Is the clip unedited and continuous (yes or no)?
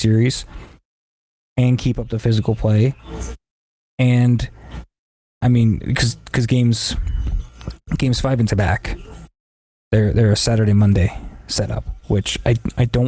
no